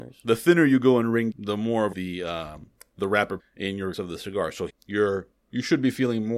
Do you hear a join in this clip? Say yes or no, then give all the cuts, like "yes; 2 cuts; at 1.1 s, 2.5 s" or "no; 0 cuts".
yes; 5 cuts; at 1.3 s, 1.9 s, 3.4 s, 3.9 s, 4.7 s